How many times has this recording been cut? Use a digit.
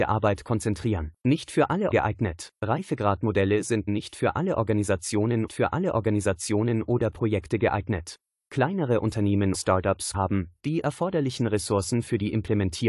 8